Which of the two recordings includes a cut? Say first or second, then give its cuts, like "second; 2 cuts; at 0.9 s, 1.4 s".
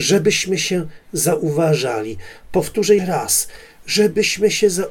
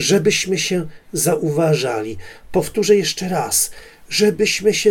first; 1 cut; at 3.0 s